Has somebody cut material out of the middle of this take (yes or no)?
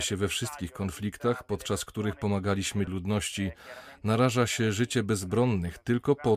yes